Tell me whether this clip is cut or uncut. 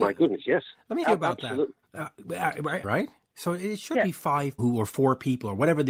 cut